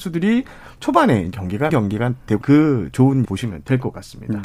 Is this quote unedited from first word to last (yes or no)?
no